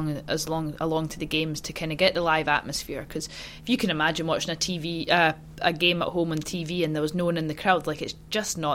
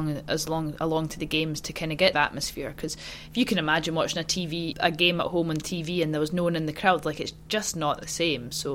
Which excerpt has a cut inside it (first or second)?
second